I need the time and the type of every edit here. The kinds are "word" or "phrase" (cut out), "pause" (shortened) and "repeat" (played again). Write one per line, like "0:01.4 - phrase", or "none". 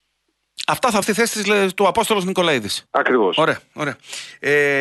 0:01.0 - word
0:02.9 - pause